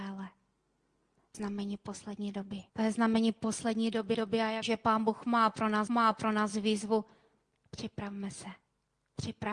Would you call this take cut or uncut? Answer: cut